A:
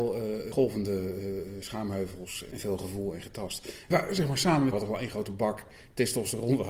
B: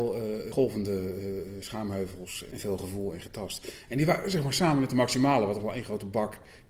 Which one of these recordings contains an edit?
A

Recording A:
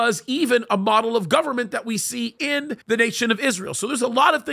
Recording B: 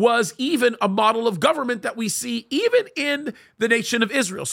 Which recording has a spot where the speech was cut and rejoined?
A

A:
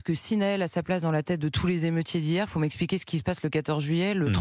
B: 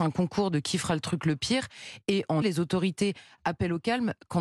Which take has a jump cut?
B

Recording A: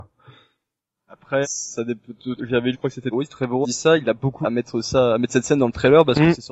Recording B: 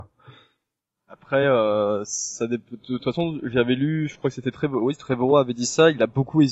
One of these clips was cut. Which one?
A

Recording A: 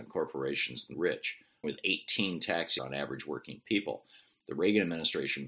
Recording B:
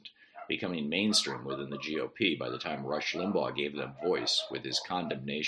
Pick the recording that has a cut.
A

